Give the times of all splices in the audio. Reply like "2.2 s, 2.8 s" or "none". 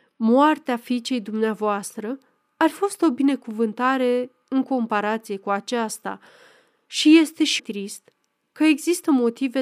2.7 s, 7.6 s